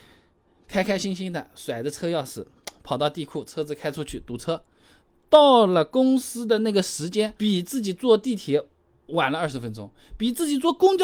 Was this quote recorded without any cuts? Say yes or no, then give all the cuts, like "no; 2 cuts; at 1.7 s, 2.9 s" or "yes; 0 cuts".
no; 1 cut; at 7.4 s